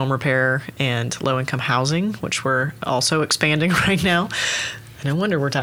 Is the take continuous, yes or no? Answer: yes